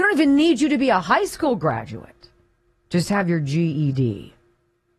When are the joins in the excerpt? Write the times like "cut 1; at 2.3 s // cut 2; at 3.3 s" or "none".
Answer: none